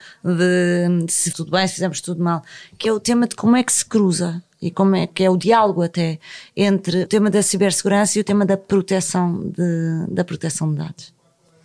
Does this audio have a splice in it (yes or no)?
yes